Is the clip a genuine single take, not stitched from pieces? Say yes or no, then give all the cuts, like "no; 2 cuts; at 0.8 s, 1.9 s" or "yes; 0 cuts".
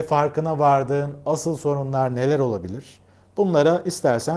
yes; 0 cuts